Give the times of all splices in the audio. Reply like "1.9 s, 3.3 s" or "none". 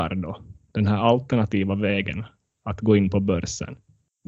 none